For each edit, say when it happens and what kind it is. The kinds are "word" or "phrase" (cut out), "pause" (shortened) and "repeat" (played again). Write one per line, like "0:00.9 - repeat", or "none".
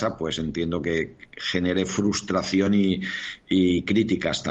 none